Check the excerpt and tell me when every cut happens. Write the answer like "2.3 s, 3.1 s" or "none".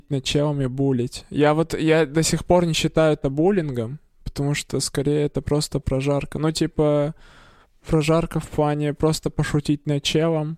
none